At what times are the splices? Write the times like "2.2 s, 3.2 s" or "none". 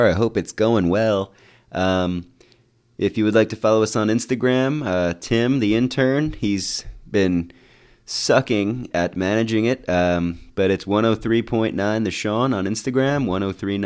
none